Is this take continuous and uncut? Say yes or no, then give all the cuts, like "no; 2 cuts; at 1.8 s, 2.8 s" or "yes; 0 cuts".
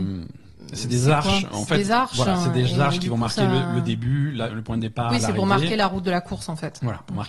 no; 1 cut; at 4.5 s